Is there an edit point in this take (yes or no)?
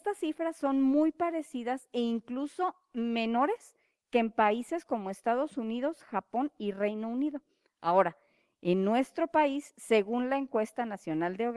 no